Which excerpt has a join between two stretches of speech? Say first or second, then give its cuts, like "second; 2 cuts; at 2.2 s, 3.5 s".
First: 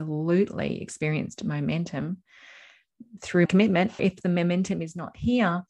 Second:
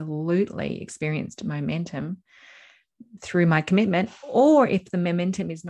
first; 2 cuts; at 3.4 s, 4.0 s